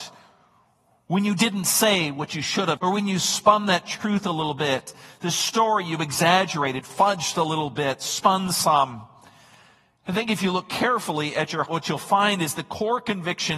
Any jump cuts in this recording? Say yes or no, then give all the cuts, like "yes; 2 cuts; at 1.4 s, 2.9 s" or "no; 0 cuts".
yes; 2 cuts; at 2.8 s, 11.7 s